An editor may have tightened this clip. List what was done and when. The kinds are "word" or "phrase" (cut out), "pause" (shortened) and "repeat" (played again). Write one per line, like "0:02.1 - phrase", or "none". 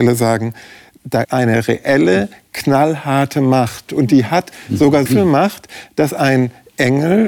0:01.2 - word
0:05.1 - word